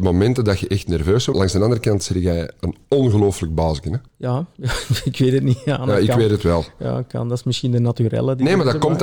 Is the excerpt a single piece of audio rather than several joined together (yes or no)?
no